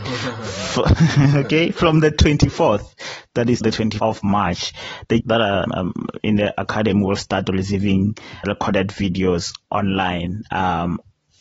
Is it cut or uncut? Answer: cut